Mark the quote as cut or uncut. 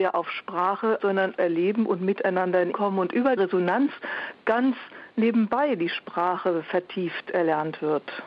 cut